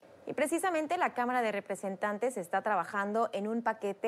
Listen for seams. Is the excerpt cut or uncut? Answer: uncut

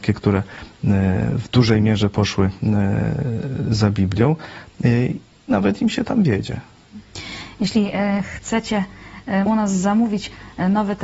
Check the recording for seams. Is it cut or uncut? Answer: cut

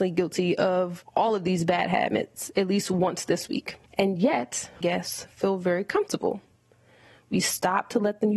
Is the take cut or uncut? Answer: cut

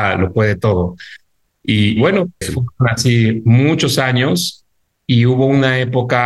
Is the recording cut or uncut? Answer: cut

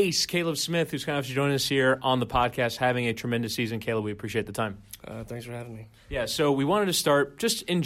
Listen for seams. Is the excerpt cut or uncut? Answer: uncut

